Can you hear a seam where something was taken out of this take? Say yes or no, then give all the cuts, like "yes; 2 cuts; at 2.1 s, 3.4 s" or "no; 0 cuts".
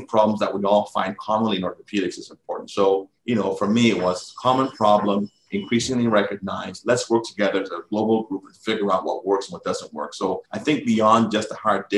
yes; 2 cuts; at 3.2 s, 10.4 s